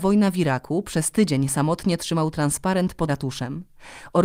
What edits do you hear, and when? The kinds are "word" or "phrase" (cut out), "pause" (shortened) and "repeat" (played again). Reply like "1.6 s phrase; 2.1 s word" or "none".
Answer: 3.1 s word